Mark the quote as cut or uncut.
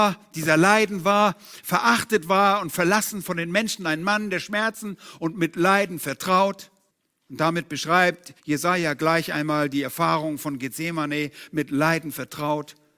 cut